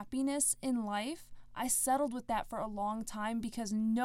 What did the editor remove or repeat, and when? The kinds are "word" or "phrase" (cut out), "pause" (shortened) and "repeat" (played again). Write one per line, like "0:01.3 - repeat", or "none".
none